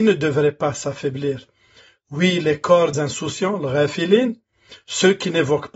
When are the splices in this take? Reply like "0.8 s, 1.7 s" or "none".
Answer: 2.9 s